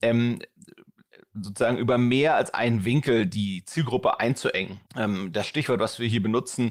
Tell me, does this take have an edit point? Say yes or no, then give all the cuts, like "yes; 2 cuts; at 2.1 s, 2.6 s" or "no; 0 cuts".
yes; 1 cut; at 4.9 s